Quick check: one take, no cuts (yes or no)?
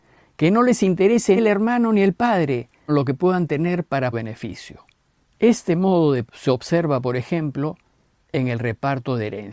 no